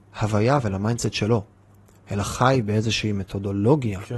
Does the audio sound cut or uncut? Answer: uncut